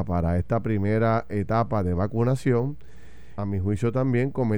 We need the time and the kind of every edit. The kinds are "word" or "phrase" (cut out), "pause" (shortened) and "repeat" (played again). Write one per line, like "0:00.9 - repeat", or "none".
0:03.4 - phrase

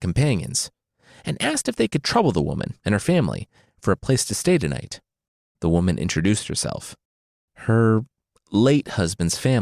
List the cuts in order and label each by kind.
none

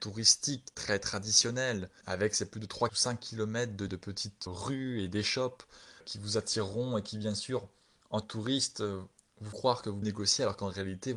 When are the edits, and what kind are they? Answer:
0:02.0 - word
0:02.9 - word
0:03.9 - word
0:04.5 - word
0:06.0 - word
0:08.2 - word
0:09.5 - word
0:10.0 - word

